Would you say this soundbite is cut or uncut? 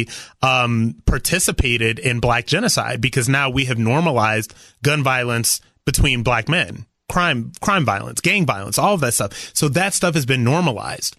uncut